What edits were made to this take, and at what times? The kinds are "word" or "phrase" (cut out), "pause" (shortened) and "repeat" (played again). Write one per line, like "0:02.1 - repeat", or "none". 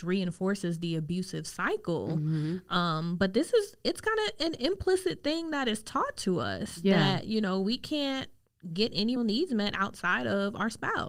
0:09.2 - word